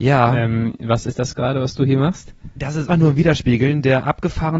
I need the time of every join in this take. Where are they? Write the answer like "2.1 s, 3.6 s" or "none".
2.9 s

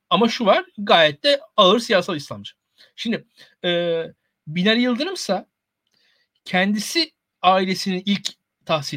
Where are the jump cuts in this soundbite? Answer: none

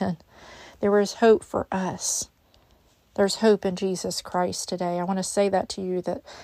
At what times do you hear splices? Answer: none

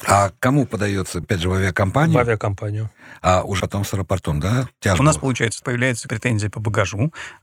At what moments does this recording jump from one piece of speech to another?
1.2 s, 3.6 s, 5.6 s, 6.1 s

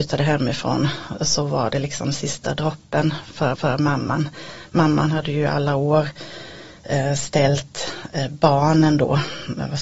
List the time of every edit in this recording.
3.5 s

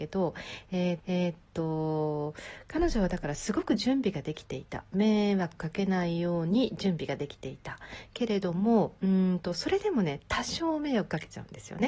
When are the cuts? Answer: 1.0 s

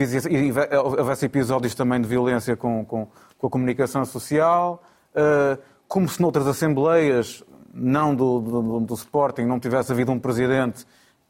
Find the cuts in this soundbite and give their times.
none

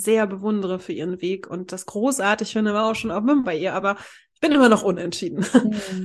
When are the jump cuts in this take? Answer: 3.4 s

